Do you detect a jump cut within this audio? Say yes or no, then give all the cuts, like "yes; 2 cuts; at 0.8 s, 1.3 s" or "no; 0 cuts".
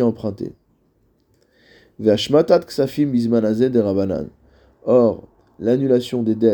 no; 0 cuts